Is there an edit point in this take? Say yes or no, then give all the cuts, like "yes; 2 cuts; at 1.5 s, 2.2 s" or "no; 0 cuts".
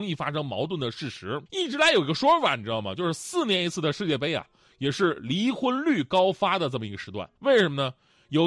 yes; 2 cuts; at 1.5 s, 7.4 s